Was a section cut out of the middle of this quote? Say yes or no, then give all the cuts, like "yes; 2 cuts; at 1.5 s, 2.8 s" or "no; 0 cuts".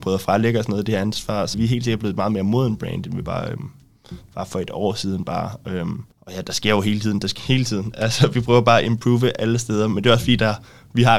yes; 3 cuts; at 1.5 s, 6.1 s, 7.4 s